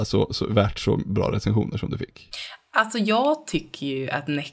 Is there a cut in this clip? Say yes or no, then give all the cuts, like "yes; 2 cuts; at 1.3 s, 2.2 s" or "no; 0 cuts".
no; 0 cuts